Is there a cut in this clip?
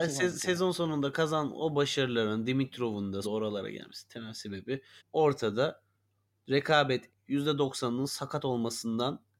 yes; 3 cuts; at 3.2 s, 5.0 s, 7.1 s

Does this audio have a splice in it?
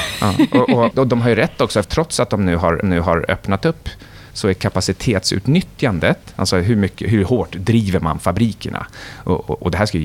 yes; 3 cuts; at 0.9 s, 1.8 s, 2.8 s

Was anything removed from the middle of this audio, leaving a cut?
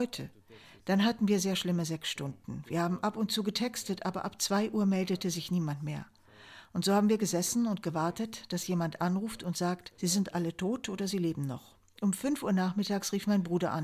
yes; 1 cut; at 9.9 s

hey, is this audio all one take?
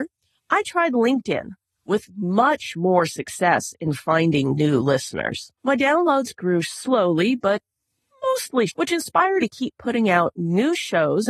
no; 3 cuts; at 5.6 s, 8.7 s, 9.4 s

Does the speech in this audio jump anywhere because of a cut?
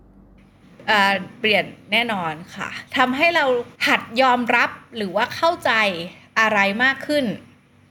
yes; 2 cuts; at 2.9 s, 3.8 s

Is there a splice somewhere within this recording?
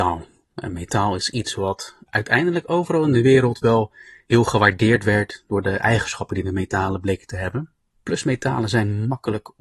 no; 0 cuts

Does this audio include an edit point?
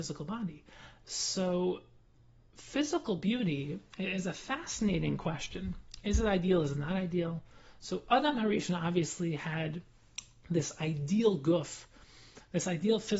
no; 0 cuts

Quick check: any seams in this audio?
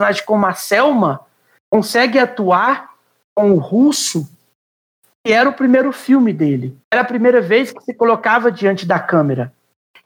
yes; 1 cut; at 6.8 s

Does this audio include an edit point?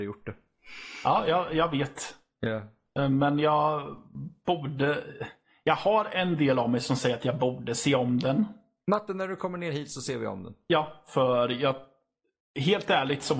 no; 0 cuts

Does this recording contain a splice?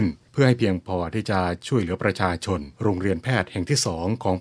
yes; 1 cut; at 2.7 s

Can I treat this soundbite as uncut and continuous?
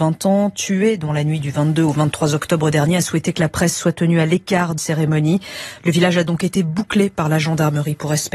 no; 1 cut; at 4.8 s

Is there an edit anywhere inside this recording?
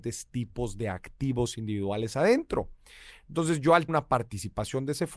yes; 1 cut; at 3.9 s

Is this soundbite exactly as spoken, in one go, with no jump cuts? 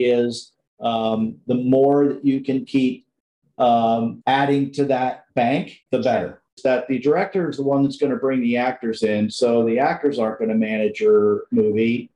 no; 3 cuts; at 4.2 s, 5.8 s, 6.5 s

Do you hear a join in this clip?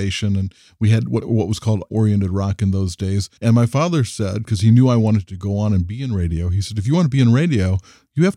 yes; 2 cuts; at 1.9 s, 3.4 s

